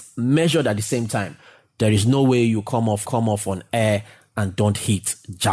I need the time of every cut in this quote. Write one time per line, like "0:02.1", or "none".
0:03.0